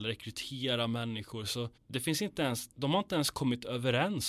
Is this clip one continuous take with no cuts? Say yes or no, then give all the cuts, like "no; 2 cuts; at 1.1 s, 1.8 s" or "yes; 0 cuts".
no; 2 cuts; at 1.8 s, 2.7 s